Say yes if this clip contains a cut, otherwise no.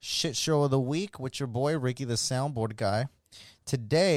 no